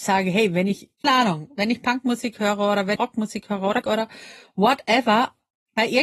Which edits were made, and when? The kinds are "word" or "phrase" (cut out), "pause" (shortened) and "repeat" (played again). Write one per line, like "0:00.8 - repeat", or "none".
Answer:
0:01.0 - word
0:03.0 - word
0:03.8 - word